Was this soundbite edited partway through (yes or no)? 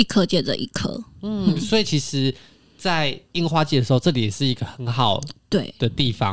no